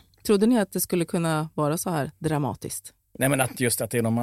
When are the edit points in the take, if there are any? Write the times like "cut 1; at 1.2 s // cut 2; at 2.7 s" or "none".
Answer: none